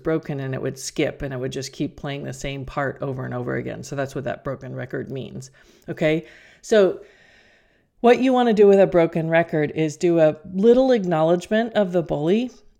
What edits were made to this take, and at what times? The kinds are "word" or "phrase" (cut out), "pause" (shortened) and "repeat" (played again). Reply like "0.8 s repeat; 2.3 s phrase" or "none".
none